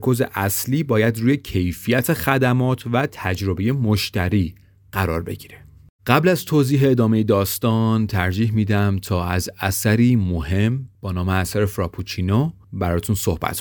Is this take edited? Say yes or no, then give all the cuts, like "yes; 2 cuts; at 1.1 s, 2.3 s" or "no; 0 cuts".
no; 0 cuts